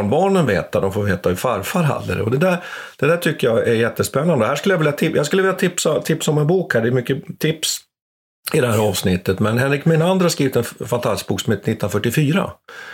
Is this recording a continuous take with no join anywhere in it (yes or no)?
yes